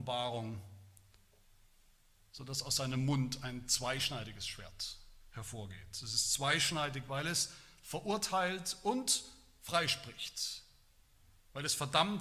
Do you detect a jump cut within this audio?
no; 0 cuts

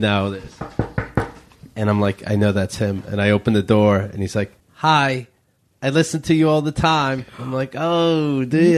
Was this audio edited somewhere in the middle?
yes; 2 cuts; at 4.6 s, 7.3 s

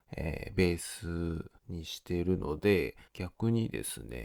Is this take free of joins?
no; 2 cuts; at 1.6 s, 3.1 s

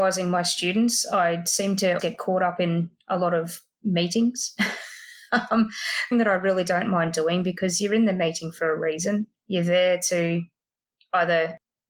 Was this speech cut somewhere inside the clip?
yes; 3 cuts; at 2.0 s, 6.1 s, 9.3 s

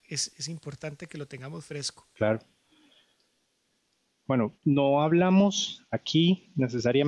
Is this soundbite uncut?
no; 1 cut; at 4.6 s

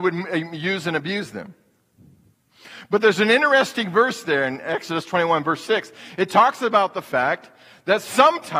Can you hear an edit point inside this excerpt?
no; 0 cuts

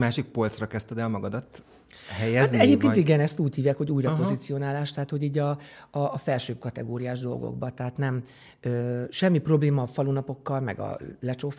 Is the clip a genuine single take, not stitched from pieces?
yes; 0 cuts

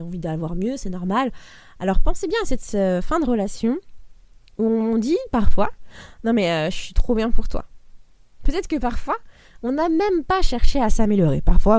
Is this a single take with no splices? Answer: yes; 0 cuts

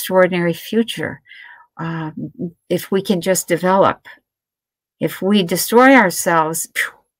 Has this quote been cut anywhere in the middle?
no; 0 cuts

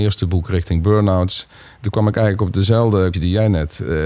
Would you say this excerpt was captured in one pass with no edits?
no; 1 cut; at 3.1 s

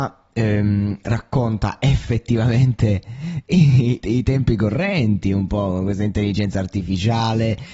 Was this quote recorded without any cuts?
no; 1 cut; at 4.0 s

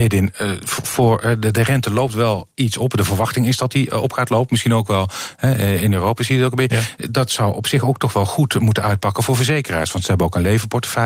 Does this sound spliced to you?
yes; 1 cut; at 2.5 s

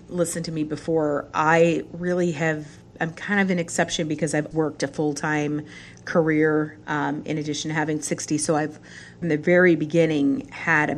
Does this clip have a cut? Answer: yes; 3 cuts; at 4.5 s, 8.0 s, 9.2 s

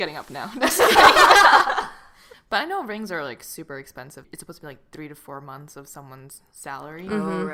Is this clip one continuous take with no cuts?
yes; 0 cuts

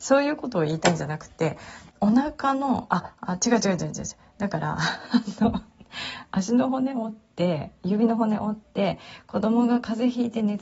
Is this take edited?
yes; 1 cut; at 1.9 s

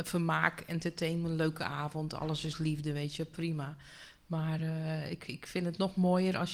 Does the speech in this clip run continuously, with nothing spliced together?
yes; 0 cuts

